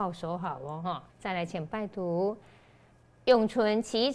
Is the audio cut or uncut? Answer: cut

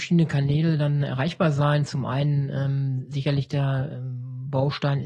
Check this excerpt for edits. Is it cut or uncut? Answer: uncut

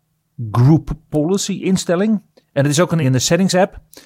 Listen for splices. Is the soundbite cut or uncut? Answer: cut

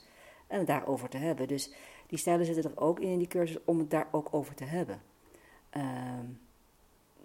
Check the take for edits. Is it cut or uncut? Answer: uncut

